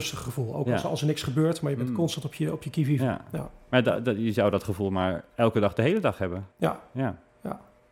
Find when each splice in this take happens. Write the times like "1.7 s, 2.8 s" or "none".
6.5 s